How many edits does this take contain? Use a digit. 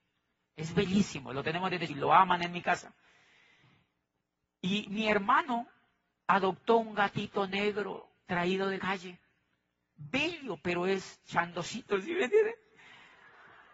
2